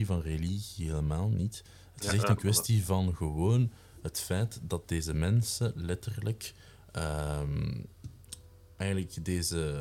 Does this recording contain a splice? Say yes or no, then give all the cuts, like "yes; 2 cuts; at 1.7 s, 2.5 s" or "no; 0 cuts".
no; 0 cuts